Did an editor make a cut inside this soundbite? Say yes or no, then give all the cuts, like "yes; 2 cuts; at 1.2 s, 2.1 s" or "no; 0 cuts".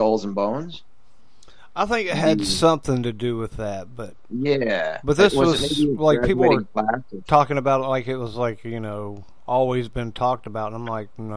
no; 0 cuts